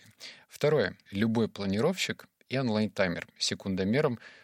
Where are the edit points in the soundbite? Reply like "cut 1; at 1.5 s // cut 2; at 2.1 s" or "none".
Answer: cut 1; at 1.1 s